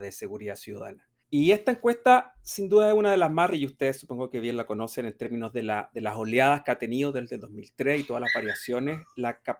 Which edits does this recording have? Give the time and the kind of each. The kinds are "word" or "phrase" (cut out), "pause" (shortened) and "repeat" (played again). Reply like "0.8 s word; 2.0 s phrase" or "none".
1.2 s pause; 3.5 s word